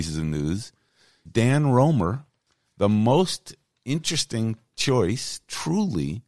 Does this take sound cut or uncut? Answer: cut